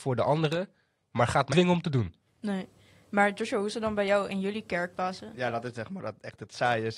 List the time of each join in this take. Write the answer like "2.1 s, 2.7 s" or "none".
1.5 s, 4.9 s